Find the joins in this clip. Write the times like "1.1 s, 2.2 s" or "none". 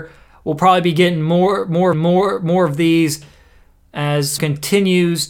1.9 s, 4.4 s